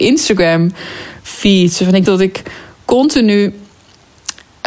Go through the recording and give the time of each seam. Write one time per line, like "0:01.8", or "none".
0:02.1